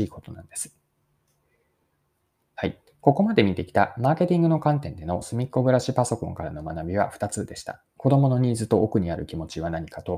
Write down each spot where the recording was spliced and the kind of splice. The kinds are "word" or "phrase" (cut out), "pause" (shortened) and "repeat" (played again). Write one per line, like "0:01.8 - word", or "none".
0:07.9 - pause